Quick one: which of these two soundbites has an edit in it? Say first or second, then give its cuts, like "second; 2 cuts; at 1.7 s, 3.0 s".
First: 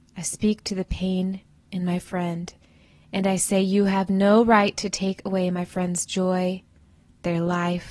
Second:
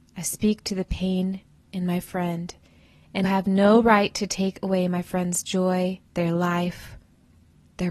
second; 2 cuts; at 3.2 s, 6.1 s